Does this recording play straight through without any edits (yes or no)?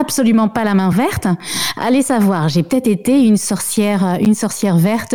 yes